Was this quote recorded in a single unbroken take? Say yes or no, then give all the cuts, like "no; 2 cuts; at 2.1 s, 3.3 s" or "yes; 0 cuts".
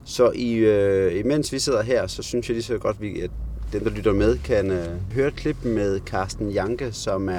yes; 0 cuts